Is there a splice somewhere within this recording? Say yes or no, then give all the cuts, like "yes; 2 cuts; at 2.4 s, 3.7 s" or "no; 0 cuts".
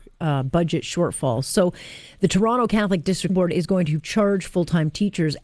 yes; 1 cut; at 3.3 s